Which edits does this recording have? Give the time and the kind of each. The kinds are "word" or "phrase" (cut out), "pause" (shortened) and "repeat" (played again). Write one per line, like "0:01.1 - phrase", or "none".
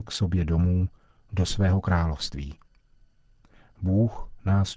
none